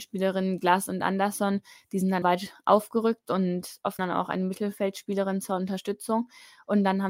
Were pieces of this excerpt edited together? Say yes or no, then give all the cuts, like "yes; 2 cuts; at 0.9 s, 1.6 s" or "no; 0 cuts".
yes; 2 cuts; at 2.2 s, 4.0 s